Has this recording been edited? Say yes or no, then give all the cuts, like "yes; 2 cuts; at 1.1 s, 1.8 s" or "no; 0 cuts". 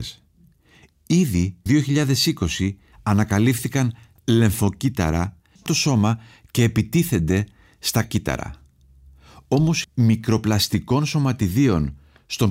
yes; 5 cuts; at 1.7 s, 4.2 s, 5.7 s, 8.0 s, 9.8 s